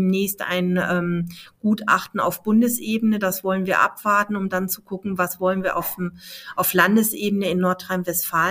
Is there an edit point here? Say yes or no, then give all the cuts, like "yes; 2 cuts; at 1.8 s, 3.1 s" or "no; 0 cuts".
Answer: no; 0 cuts